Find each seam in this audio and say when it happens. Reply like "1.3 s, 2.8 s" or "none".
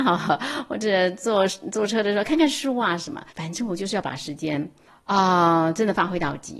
3.3 s, 4.9 s